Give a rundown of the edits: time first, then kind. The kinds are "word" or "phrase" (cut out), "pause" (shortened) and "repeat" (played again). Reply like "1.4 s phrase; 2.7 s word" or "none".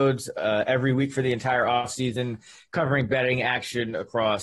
none